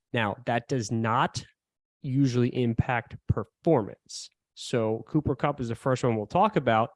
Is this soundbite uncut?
yes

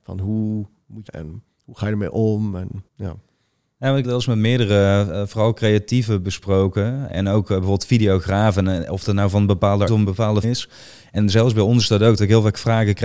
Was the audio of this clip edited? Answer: yes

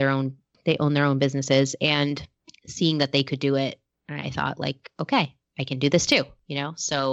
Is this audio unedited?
yes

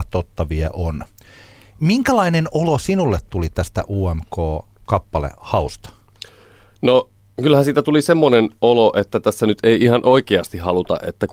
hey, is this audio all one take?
yes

